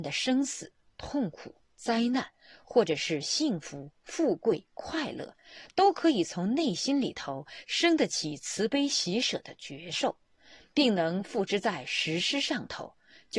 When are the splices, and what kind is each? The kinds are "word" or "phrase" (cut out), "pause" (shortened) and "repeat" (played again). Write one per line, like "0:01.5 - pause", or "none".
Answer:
none